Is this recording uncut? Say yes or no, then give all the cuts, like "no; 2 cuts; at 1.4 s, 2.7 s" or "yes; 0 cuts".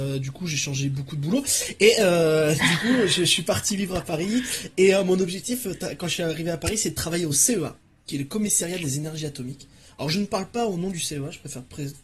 yes; 0 cuts